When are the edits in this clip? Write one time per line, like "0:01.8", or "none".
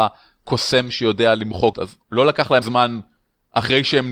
0:01.7
0:02.0
0:02.6